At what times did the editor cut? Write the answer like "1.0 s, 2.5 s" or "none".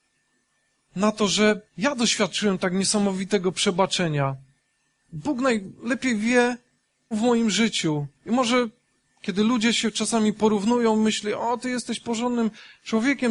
1.7 s, 4.6 s, 7.1 s, 8.2 s, 9.0 s